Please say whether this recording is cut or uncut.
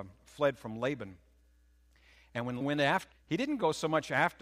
cut